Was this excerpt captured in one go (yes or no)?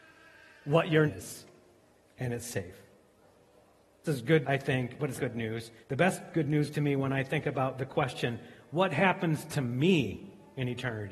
no